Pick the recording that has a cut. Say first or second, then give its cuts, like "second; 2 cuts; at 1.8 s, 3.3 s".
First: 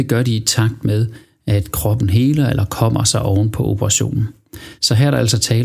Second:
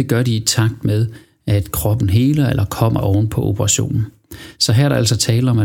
second; 1 cut; at 3.0 s